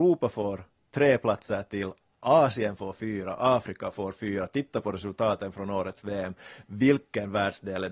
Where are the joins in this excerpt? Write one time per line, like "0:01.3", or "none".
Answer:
none